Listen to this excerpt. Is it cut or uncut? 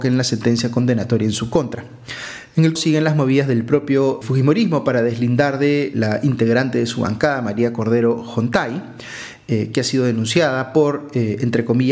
cut